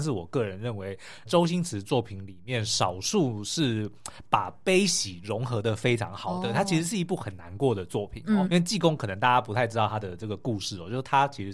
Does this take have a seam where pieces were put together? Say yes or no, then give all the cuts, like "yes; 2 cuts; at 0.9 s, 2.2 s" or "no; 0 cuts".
yes; 2 cuts; at 1.3 s, 8.5 s